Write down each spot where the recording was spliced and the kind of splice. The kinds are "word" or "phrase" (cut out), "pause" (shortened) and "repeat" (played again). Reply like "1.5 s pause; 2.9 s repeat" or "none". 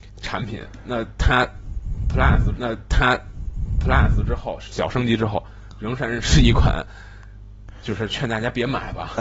2.5 s repeat